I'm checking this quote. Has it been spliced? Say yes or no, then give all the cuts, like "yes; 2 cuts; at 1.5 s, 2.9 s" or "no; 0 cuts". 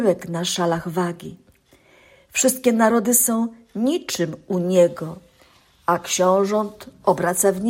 no; 0 cuts